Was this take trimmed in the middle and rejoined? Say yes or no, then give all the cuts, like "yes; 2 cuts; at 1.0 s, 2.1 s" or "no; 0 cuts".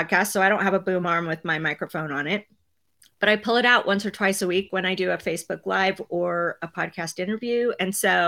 no; 0 cuts